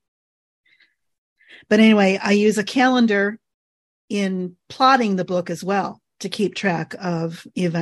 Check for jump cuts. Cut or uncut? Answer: uncut